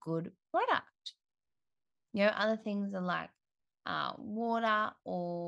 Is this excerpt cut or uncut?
uncut